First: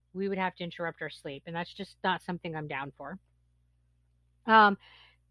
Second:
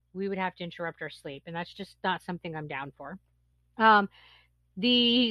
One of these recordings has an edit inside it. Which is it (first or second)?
second